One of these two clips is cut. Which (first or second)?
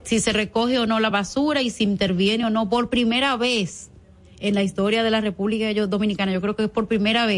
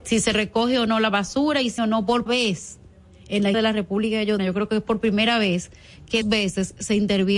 second